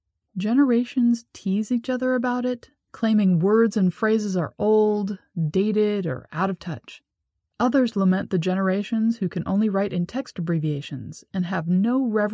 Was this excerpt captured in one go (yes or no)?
yes